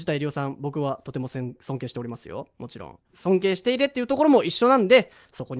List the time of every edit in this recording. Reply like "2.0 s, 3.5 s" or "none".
3.1 s